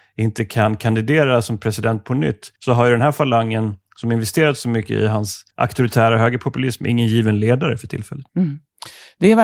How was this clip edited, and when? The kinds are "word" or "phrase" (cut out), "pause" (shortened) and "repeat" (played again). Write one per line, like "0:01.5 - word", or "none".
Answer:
0:02.6 - pause
0:05.5 - pause
0:08.3 - pause